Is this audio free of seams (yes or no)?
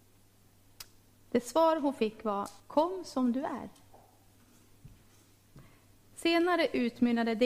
no